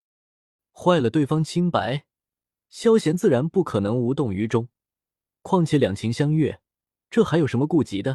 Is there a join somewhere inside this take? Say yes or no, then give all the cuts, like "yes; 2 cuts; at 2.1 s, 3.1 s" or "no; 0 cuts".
no; 0 cuts